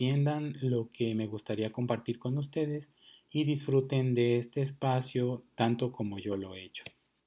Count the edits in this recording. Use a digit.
0